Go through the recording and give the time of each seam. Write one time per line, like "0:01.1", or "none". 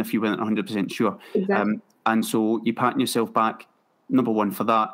none